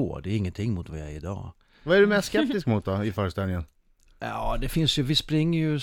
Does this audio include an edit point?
no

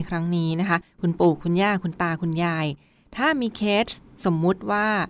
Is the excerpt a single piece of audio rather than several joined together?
yes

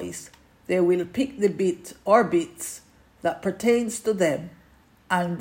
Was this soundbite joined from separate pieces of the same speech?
no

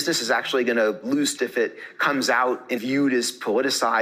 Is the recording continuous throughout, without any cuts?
no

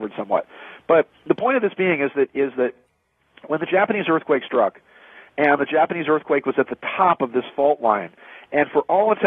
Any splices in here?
no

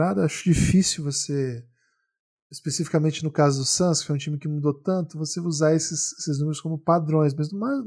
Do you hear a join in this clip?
no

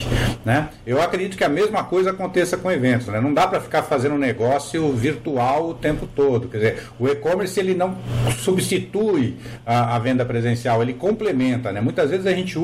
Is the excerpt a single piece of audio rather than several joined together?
yes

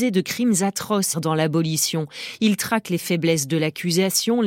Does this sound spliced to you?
yes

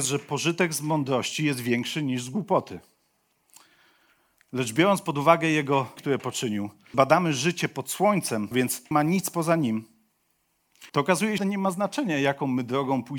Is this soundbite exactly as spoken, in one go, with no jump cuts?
no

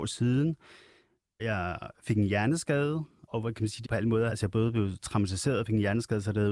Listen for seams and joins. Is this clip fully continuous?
no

